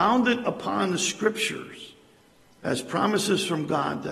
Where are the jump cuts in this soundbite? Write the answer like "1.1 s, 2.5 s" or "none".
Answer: 2.3 s